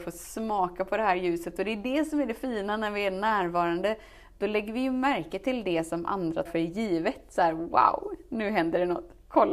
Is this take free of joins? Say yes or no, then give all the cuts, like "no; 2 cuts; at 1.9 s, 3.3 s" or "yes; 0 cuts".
no; 1 cut; at 6.5 s